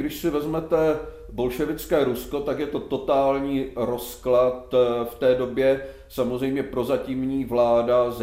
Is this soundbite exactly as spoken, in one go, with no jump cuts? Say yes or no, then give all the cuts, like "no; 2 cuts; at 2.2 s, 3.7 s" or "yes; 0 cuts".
yes; 0 cuts